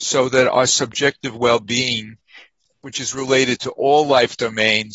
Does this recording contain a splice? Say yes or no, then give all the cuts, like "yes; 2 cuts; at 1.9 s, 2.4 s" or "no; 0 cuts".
no; 0 cuts